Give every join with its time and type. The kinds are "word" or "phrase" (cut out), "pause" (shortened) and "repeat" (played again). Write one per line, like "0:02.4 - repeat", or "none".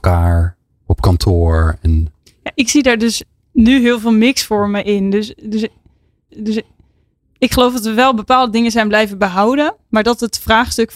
0:06.3 - repeat